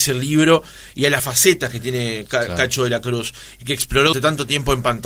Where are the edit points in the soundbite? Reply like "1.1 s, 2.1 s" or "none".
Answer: 1.2 s, 4.1 s